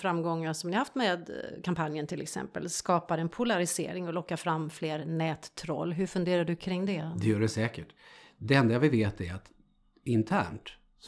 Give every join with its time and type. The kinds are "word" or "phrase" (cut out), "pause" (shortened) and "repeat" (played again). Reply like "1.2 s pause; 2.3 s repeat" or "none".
none

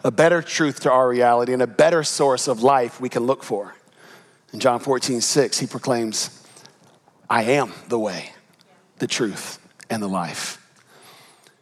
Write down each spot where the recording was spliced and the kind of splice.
none

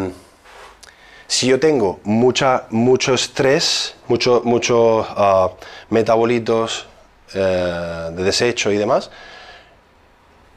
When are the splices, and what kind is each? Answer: none

